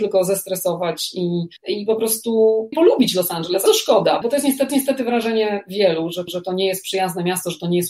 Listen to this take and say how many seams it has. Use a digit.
6